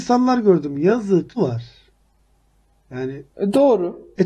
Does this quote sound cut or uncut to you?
cut